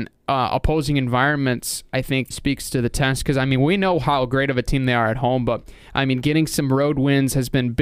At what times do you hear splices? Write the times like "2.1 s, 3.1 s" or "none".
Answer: 2.3 s